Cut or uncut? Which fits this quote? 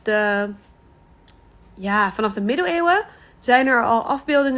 uncut